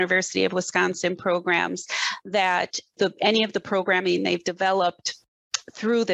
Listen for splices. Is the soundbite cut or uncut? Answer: uncut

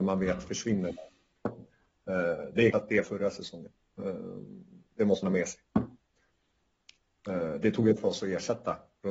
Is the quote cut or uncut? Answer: cut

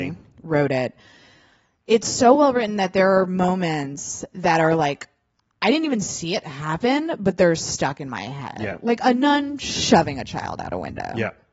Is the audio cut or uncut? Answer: uncut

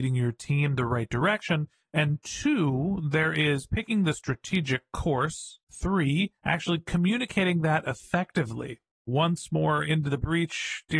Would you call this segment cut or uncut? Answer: uncut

